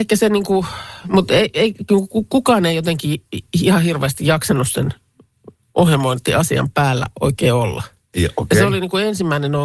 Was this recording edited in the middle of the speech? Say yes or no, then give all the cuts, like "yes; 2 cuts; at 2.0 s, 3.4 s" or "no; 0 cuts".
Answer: no; 0 cuts